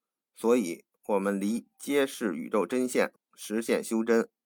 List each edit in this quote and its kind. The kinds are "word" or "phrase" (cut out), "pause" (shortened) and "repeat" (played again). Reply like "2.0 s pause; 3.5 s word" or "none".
3.2 s pause